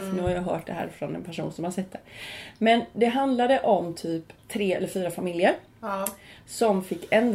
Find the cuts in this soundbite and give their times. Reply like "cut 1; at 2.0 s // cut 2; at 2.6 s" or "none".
cut 1; at 4.4 s